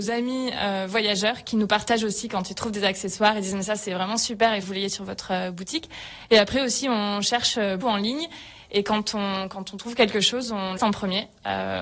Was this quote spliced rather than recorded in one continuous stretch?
yes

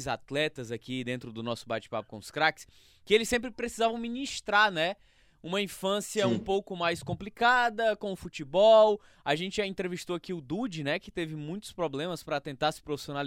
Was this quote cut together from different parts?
no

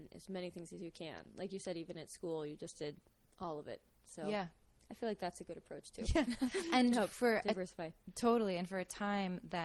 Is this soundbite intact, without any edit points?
yes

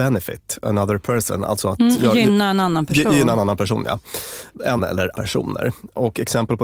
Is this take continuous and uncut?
no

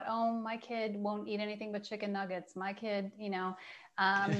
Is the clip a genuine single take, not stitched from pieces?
yes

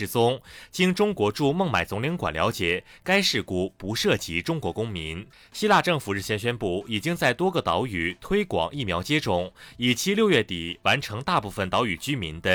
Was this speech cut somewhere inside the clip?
yes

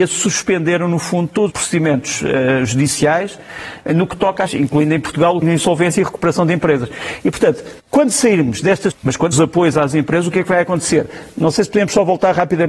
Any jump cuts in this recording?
yes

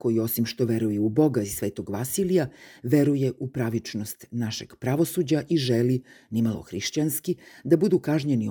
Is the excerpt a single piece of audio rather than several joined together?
yes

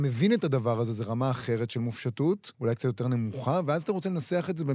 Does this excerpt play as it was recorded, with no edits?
no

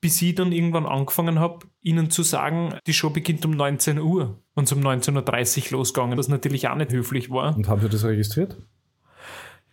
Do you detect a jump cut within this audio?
yes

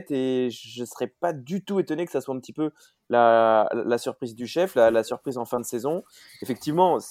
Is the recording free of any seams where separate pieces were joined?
yes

